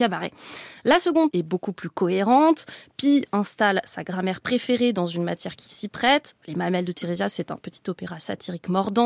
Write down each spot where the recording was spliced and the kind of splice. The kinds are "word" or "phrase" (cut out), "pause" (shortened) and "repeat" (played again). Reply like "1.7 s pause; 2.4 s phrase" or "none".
1.3 s word